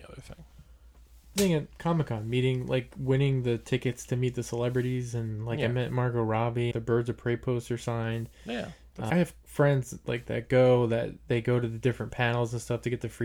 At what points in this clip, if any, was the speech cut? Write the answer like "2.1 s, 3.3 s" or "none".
1.4 s, 6.7 s, 9.1 s